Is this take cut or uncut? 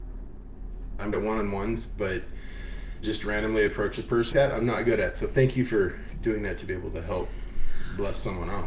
cut